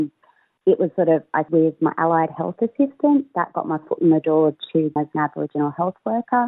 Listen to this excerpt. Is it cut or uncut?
cut